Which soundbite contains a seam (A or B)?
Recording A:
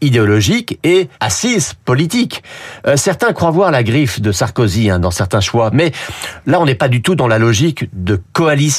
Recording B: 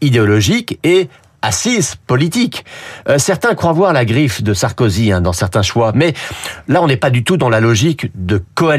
A